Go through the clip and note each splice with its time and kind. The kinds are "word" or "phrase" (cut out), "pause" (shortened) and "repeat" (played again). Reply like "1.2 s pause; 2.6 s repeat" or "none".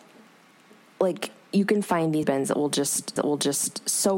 2.2 s word; 3.2 s repeat